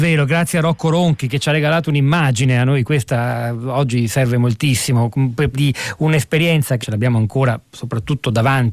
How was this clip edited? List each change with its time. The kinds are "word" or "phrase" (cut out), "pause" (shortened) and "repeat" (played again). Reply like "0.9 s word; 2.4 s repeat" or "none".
5.5 s word; 6.8 s phrase